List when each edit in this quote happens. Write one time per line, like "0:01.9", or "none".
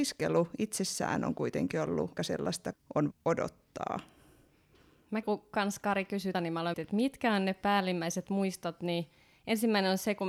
0:02.2
0:02.7
0:03.1
0:05.2
0:06.3
0:06.7